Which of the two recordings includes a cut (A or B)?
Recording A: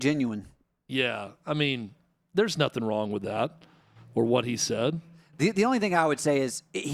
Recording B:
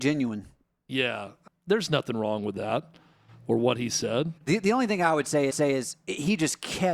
B